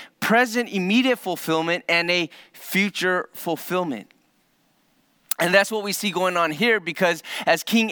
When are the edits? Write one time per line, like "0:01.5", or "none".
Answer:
none